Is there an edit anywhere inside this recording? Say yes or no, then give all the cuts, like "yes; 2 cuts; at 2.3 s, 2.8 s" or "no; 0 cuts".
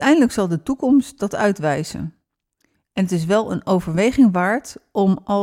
no; 0 cuts